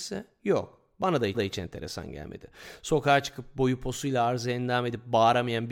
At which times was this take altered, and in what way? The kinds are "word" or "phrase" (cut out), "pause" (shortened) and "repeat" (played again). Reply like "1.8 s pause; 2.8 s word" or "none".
1.3 s repeat